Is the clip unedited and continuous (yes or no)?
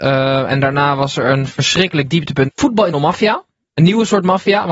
no